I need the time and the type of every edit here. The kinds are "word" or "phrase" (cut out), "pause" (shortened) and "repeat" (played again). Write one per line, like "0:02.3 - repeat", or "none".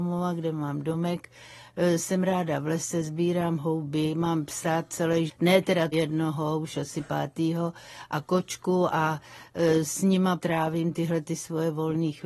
0:05.3 - word
0:05.9 - word
0:10.4 - word